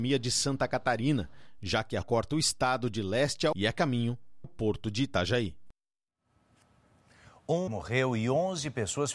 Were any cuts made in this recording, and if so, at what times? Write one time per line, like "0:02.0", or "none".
0:02.0
0:03.5
0:04.4
0:07.7